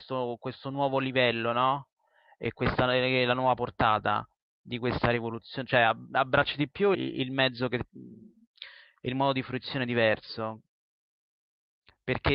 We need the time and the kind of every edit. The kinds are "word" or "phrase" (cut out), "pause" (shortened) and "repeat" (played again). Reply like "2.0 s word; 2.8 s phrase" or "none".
6.9 s word